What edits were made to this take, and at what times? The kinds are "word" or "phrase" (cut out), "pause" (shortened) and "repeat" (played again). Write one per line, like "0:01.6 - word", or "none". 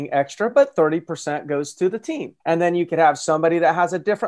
0:02.4 - pause